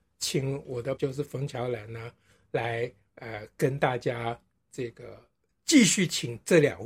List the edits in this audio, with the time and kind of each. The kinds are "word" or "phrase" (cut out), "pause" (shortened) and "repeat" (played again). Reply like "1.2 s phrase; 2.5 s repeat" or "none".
1.0 s word